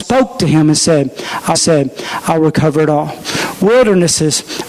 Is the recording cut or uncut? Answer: cut